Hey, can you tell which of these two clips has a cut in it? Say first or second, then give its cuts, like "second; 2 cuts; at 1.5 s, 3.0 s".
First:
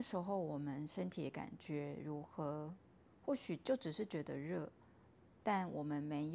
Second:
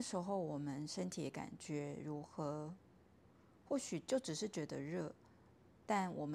first; 1 cut; at 3.1 s